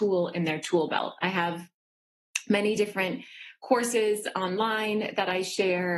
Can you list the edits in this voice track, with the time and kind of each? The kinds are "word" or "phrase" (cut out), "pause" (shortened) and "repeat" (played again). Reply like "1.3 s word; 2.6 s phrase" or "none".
none